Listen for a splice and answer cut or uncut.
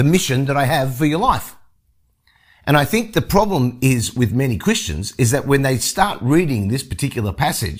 uncut